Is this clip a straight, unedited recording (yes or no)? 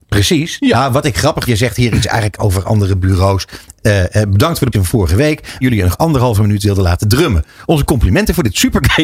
no